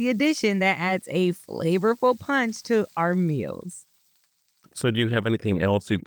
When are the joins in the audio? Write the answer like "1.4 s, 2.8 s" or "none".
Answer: none